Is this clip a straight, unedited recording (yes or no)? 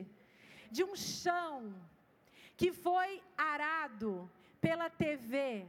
yes